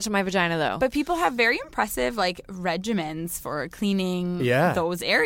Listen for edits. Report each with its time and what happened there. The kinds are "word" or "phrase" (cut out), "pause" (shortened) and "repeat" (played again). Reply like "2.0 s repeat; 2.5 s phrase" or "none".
none